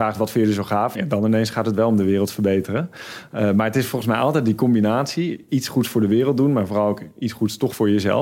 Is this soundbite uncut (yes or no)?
no